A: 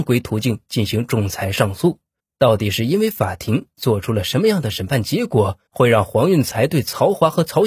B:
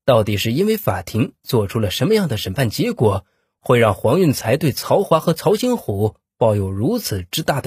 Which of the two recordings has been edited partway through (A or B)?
A